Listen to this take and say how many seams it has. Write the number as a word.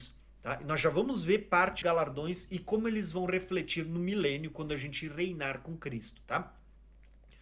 one